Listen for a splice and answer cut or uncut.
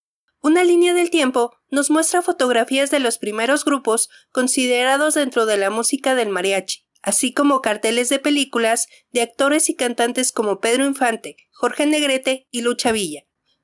cut